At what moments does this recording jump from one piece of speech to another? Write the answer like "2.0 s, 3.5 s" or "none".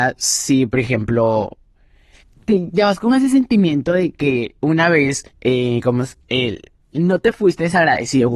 4.6 s, 5.3 s